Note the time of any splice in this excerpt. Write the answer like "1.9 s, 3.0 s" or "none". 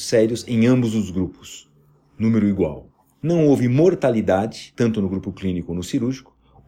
none